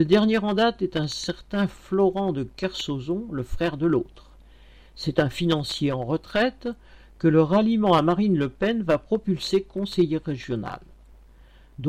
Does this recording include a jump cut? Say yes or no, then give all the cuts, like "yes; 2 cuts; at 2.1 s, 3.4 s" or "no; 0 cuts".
no; 0 cuts